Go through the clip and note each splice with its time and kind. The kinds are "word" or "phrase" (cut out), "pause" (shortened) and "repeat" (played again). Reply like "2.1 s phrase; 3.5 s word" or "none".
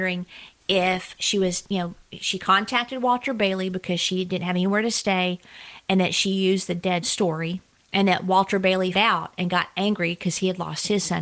2.0 s pause; 7.0 s word; 7.8 s pause; 8.9 s word